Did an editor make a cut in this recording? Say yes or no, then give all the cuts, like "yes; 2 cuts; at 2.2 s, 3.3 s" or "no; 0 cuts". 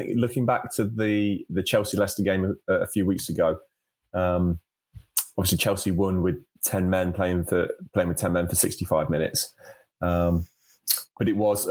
no; 0 cuts